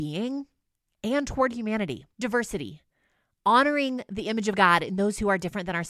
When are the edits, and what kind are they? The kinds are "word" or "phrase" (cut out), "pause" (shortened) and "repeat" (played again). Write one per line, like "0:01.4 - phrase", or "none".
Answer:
0:02.1 - pause